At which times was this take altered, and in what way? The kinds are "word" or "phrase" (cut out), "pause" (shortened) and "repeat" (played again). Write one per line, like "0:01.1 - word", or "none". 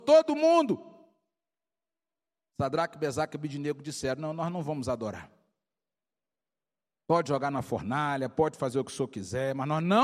none